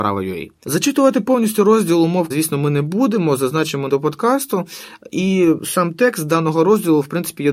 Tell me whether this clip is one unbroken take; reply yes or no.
no